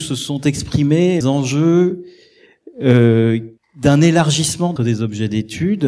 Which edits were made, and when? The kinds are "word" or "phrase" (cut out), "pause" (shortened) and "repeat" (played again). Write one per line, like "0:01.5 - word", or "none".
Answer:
0:01.2 - word
0:03.6 - pause
0:04.8 - word